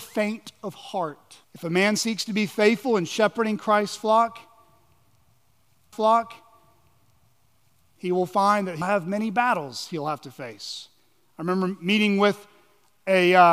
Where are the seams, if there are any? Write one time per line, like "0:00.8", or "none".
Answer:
0:01.4
0:05.9
0:08.8